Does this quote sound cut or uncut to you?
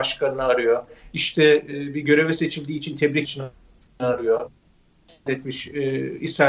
cut